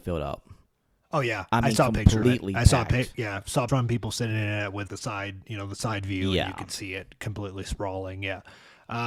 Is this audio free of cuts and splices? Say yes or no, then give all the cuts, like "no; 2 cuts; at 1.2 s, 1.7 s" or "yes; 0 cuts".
no; 3 cuts; at 2.2 s, 3.7 s, 4.9 s